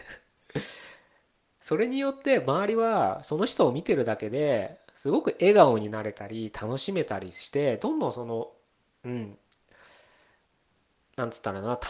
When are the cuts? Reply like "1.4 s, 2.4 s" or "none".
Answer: none